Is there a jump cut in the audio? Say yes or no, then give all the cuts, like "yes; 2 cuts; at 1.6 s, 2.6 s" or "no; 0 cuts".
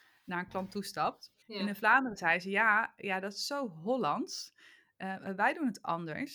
yes; 1 cut; at 1.4 s